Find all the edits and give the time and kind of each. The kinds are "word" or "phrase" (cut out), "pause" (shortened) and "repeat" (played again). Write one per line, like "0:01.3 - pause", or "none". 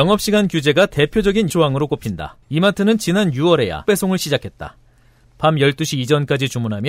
0:01.5 - word
0:02.4 - pause
0:03.9 - word